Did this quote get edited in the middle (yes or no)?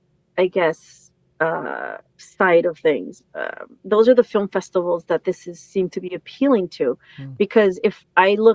yes